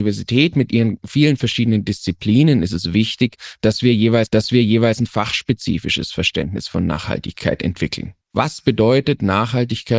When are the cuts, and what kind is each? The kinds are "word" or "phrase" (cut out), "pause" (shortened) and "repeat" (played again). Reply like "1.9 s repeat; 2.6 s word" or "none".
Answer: 4.3 s repeat; 8.2 s pause